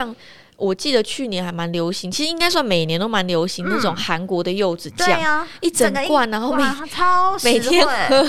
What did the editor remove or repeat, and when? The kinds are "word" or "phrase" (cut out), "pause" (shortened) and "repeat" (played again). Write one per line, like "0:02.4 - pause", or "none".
none